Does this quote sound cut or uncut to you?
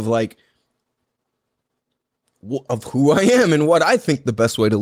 uncut